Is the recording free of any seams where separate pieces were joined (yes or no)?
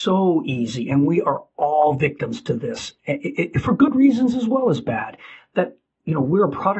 yes